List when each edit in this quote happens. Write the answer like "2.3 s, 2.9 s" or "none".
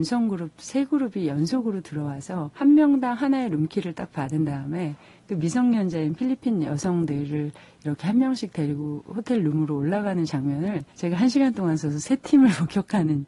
2.5 s, 10.9 s

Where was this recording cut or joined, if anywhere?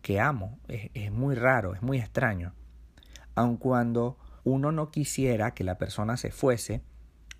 4.4 s

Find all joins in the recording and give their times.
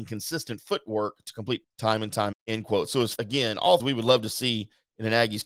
1.6 s, 2.3 s, 3.2 s, 3.8 s

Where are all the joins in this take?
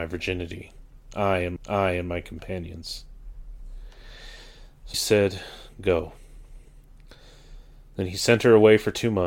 1.6 s, 4.9 s

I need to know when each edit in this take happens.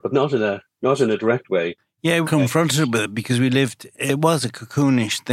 2.2 s

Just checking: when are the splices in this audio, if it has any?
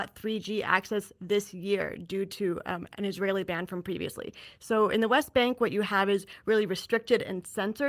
none

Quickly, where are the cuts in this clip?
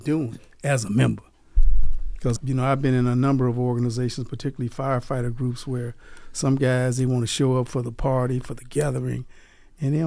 2.4 s

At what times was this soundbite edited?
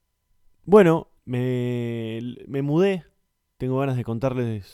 1.2 s, 3.3 s

